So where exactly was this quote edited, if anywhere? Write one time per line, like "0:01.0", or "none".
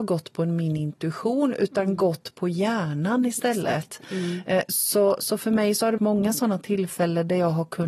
0:06.0

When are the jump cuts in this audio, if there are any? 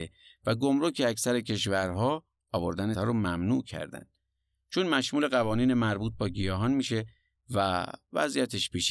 0:02.9

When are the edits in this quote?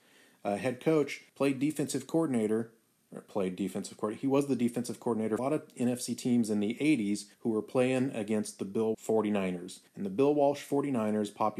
0:01.3
0:05.4
0:07.3
0:08.9
0:09.9

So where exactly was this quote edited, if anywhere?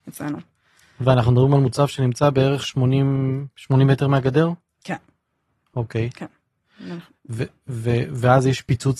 none

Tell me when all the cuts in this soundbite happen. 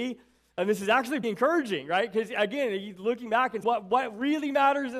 0:01.2
0:03.6

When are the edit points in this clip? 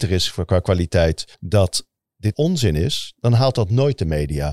0:01.3
0:02.3

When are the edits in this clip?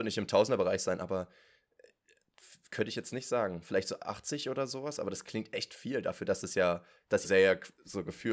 0:07.2

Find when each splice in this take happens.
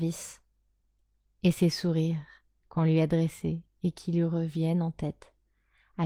none

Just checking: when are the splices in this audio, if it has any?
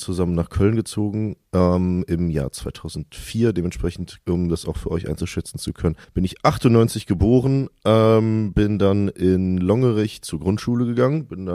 0:04.2
0:06.0

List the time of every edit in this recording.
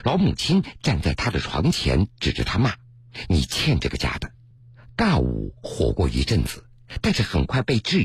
0:02.8
0:04.6

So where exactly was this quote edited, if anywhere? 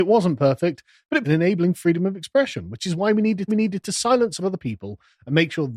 0:01.2
0:03.5
0:04.4

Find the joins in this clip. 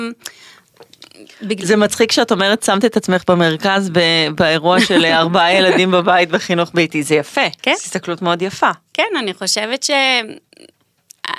0:07.6

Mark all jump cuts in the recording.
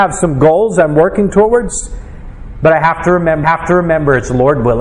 0:03.4

